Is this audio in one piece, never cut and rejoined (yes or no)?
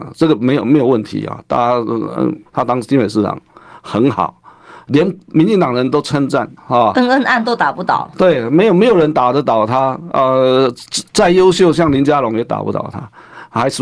no